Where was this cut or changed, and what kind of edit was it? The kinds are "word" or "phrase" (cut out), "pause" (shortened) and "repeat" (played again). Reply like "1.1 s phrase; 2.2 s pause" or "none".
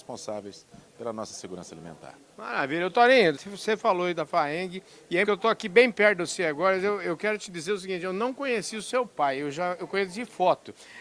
3.3 s word; 5.2 s word

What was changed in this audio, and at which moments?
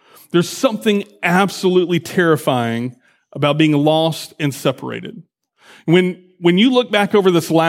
none

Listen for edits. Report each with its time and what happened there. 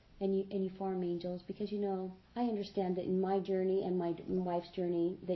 2.3 s pause

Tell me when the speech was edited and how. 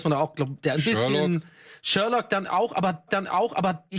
3.1 s repeat

